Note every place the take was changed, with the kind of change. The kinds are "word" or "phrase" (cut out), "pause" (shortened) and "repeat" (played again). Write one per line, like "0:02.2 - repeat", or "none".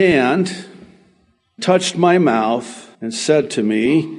0:01.6 - word
0:02.9 - pause